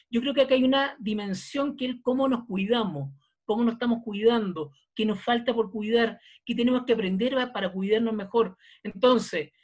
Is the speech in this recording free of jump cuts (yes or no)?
yes